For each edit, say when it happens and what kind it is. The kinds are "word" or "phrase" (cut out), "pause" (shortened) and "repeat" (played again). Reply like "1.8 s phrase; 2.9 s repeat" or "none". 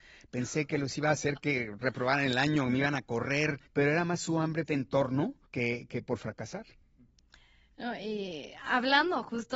3.7 s pause; 4.7 s phrase; 5.5 s pause